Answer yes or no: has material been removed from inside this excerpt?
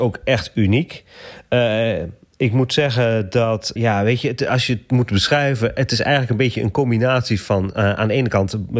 yes